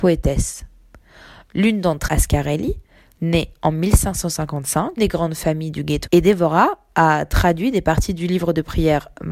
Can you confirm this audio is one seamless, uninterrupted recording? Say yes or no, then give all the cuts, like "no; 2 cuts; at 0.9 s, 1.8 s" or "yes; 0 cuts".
no; 3 cuts; at 2.1 s, 5.0 s, 6.1 s